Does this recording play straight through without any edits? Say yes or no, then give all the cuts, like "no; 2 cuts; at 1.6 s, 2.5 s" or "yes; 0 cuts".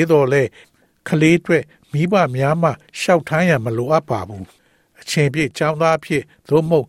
yes; 0 cuts